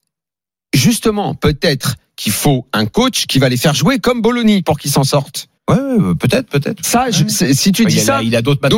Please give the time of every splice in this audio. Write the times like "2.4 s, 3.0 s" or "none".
5.6 s